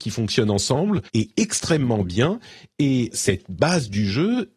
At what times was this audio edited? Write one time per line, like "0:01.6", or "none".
0:01.1
0:03.1